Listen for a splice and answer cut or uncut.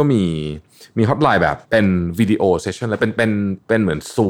cut